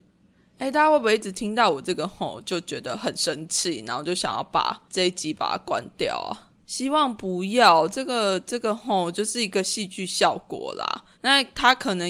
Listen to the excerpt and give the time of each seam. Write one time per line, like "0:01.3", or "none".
0:04.9
0:05.3
0:06.6
0:11.1